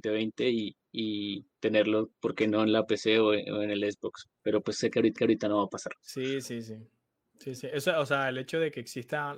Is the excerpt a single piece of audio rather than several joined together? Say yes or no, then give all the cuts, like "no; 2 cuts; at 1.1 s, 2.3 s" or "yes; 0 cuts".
no; 2 cuts; at 4.3 s, 5.2 s